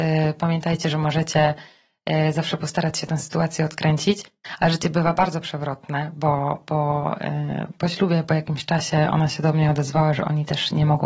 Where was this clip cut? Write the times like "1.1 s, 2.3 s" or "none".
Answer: none